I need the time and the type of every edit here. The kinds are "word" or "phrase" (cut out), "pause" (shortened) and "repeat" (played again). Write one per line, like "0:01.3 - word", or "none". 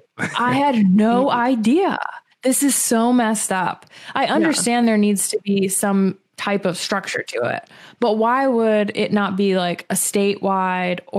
none